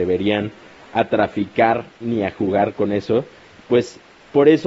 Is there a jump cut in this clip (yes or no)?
yes